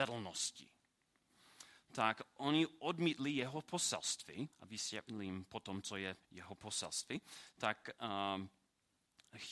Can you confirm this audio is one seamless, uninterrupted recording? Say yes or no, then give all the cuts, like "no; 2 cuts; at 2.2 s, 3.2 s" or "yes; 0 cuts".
no; 2 cuts; at 4.5 s, 6.2 s